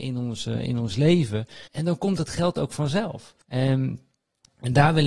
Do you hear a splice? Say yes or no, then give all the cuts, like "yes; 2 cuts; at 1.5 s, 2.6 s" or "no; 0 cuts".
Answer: yes; 2 cuts; at 1.7 s, 3.4 s